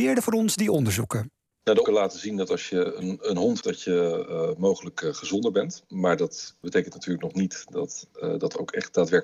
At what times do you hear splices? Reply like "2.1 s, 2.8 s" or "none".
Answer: 1.8 s, 3.6 s, 6.6 s

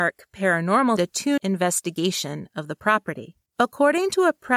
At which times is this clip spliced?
1.0 s, 1.4 s, 3.5 s

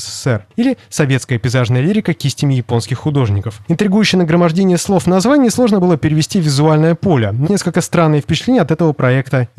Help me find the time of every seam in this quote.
7.4 s

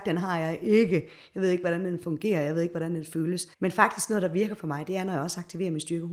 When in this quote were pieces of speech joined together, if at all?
3.5 s

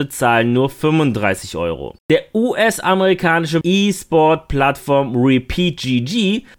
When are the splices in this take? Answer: 2.0 s, 3.6 s

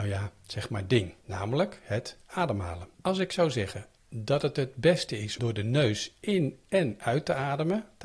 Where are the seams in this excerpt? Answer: 1.2 s, 2.9 s, 5.4 s

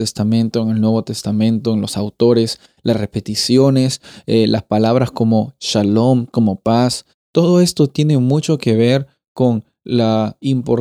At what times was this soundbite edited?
none

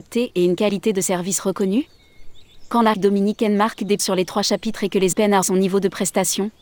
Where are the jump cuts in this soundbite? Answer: 2.9 s, 4.0 s, 5.1 s, 5.4 s

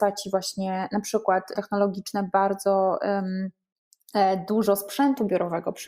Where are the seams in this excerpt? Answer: 1.6 s

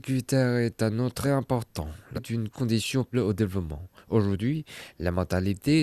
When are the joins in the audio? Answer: 1.2 s, 2.2 s, 3.1 s

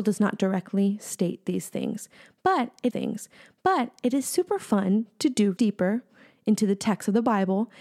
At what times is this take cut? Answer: 2.9 s, 5.6 s

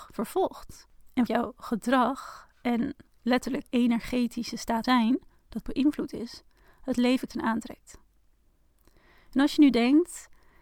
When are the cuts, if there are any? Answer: 1.3 s, 3.6 s, 4.8 s, 5.6 s, 7.3 s

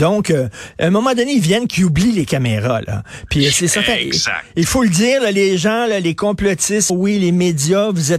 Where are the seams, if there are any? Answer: 6.9 s

